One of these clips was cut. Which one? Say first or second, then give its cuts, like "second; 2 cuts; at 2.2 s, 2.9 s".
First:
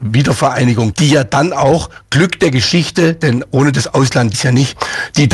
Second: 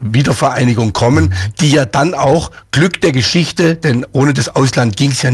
first; 2 cuts; at 0.9 s, 4.3 s